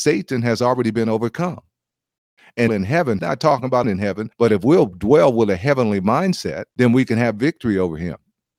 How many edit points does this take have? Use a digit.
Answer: 5